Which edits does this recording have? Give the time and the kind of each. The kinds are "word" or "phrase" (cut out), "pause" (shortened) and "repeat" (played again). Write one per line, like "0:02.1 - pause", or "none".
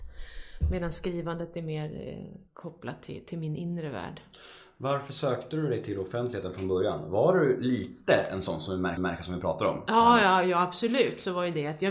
0:02.5 - pause
0:09.0 - repeat